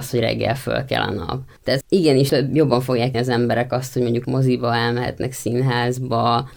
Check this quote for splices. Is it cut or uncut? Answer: cut